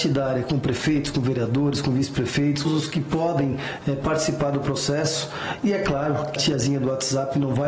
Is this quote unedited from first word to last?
no; 2 cuts; at 2.6 s, 6.4 s

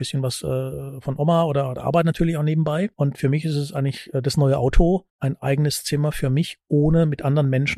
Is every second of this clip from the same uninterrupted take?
no; 1 cut; at 5.1 s

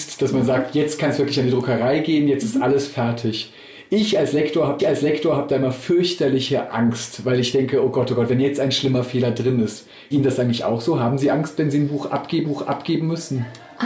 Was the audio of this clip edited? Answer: yes; 3 cuts; at 4.8 s, 10.1 s, 12.4 s

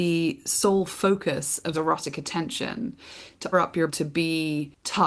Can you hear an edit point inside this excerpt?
yes; 3 cuts; at 1.7 s, 3.5 s, 3.9 s

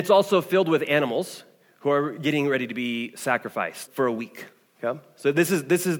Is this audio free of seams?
no; 1 cut; at 3.9 s

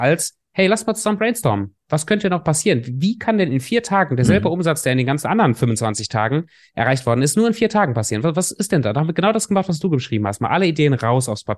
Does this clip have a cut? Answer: no; 0 cuts

